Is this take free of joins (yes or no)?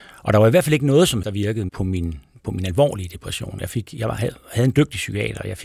no